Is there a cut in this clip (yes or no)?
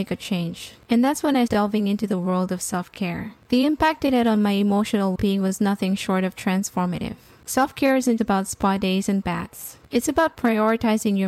yes